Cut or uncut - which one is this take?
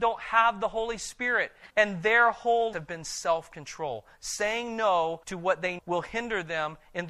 cut